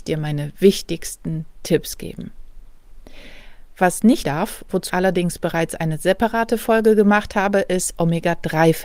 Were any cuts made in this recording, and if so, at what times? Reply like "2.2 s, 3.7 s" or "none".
4.2 s, 4.9 s